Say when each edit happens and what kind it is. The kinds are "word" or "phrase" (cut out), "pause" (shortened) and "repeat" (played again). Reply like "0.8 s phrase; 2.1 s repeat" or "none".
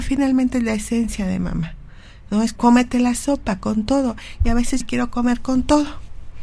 2.6 s word; 4.8 s phrase